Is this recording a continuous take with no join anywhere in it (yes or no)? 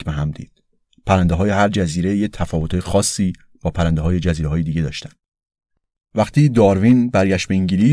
yes